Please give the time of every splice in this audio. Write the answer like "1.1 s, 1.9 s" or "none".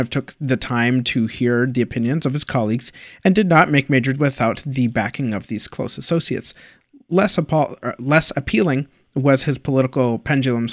4.1 s, 7.8 s